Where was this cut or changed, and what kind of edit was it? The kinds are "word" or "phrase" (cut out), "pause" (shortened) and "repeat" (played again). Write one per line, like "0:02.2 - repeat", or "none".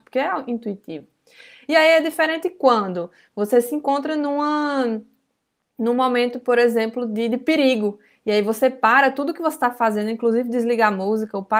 none